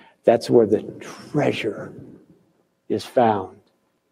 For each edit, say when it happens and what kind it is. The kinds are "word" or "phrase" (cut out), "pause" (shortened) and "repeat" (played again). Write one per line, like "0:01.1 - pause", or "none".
none